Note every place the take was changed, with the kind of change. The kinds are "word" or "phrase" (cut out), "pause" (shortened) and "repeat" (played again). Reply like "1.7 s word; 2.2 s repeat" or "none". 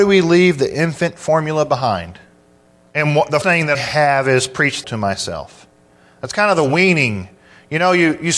2.7 s pause; 3.4 s word; 3.7 s word; 4.8 s phrase